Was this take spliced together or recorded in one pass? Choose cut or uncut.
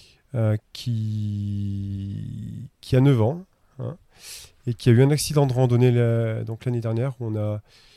uncut